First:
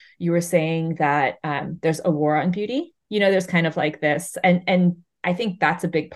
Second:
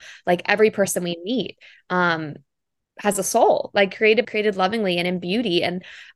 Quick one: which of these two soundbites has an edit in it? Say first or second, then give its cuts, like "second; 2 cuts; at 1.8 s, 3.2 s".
second; 1 cut; at 4.2 s